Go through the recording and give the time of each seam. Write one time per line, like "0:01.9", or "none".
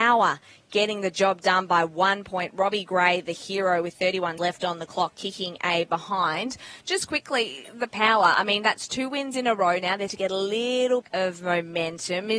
0:04.4
0:10.1
0:11.0

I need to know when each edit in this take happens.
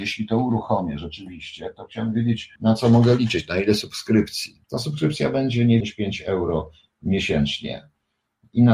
0:02.6
0:04.6
0:05.8

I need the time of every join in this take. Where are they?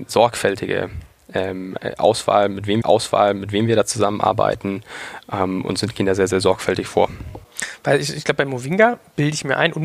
0:02.8

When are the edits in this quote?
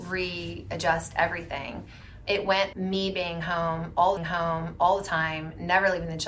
0:02.3
0:02.7
0:04.2

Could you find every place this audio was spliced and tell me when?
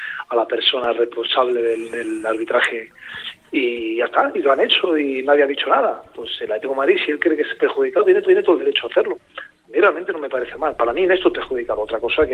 0:08.3

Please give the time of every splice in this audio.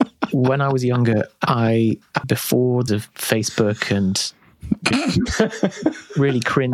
0:02.2
0:02.9
0:04.9

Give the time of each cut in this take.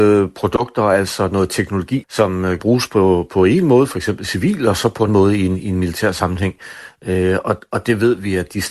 0:02.0
0:02.6
0:05.1

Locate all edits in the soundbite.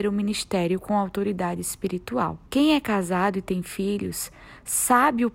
0:02.5

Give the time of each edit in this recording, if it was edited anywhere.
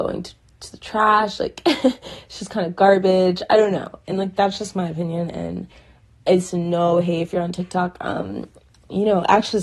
none

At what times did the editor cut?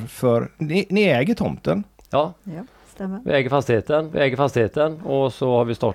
0:04.1

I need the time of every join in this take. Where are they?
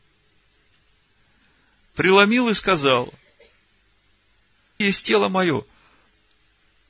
0:04.8

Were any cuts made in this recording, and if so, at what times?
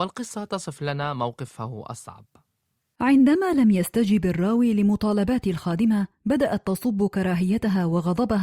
none

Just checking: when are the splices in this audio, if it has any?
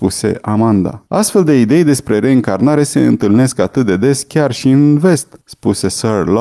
0:01.1
0:05.4

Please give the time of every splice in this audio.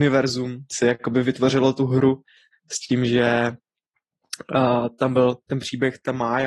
0:02.5

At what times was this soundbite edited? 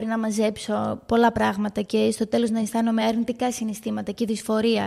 none

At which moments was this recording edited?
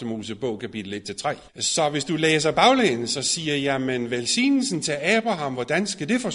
0:01.5

